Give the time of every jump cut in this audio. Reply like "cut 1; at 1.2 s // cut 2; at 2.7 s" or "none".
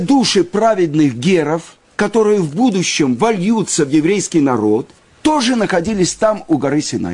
cut 1; at 1.8 s // cut 2; at 5.0 s